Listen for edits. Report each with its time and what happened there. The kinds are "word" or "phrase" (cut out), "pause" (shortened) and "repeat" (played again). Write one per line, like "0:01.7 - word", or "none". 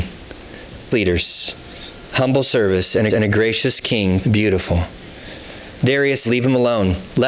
0:00.9 - word
0:03.1 - repeat
0:04.2 - phrase
0:06.2 - word